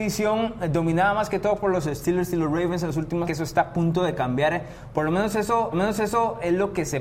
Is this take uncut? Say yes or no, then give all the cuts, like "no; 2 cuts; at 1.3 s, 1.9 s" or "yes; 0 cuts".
no; 2 cuts; at 3.2 s, 5.7 s